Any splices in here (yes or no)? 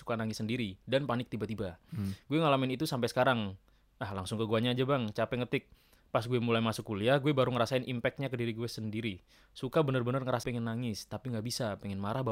yes